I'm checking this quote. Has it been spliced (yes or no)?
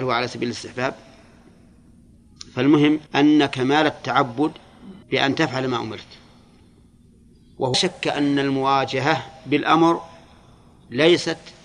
yes